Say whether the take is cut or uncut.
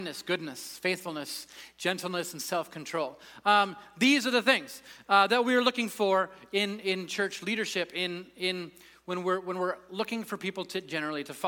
uncut